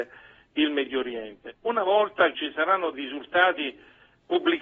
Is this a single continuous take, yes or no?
no